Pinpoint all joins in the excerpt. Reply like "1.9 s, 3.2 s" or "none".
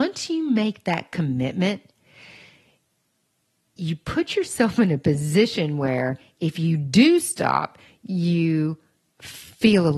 none